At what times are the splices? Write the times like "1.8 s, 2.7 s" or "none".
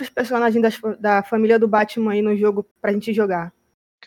2.7 s